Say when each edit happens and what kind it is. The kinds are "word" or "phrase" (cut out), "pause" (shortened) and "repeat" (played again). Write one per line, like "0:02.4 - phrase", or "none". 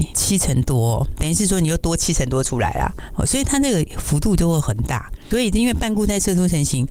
0:01.2 - phrase